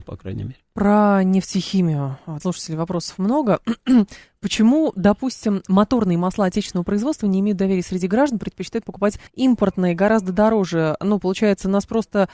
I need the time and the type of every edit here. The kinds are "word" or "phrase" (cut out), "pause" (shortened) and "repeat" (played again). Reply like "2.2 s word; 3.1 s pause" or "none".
2.4 s word; 9.3 s pause